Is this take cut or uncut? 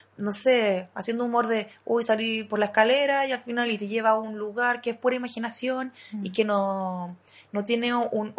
uncut